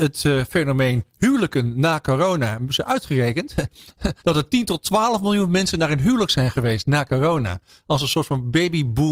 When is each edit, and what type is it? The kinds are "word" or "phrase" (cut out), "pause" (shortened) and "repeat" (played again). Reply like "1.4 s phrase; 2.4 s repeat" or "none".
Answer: 4.2 s pause